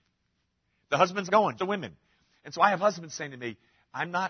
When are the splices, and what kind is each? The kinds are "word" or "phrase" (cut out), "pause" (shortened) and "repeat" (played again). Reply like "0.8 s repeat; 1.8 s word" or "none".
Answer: 1.3 s word; 1.6 s word